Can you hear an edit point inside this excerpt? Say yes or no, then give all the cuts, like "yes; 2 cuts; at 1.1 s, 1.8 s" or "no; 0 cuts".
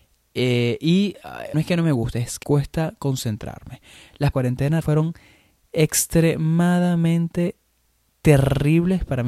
yes; 4 cuts; at 1.5 s, 2.4 s, 4.3 s, 4.8 s